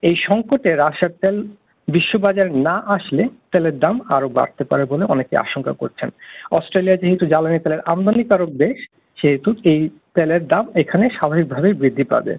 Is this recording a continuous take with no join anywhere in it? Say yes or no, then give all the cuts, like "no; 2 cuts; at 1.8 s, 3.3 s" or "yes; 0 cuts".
yes; 0 cuts